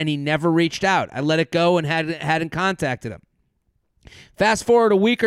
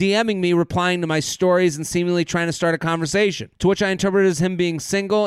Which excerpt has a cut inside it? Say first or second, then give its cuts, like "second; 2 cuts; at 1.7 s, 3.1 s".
second; 1 cut; at 3.5 s